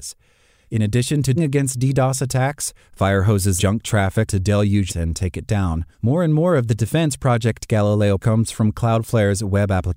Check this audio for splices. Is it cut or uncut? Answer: cut